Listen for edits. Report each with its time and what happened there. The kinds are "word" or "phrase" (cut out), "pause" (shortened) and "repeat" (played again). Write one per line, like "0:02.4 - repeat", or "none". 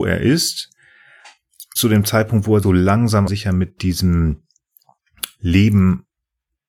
0:01.8 - word
0:02.6 - word
0:03.3 - word